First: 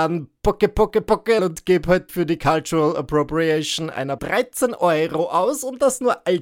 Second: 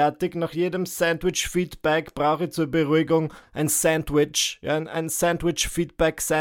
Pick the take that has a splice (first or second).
first